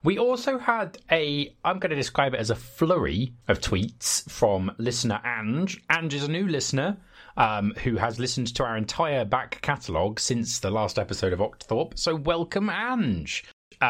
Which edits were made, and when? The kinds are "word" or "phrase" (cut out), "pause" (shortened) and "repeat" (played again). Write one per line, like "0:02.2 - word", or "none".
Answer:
0:03.4 - pause